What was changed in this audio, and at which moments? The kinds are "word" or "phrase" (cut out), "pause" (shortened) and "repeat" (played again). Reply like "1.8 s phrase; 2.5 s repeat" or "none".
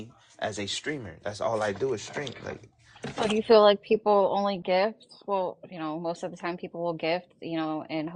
none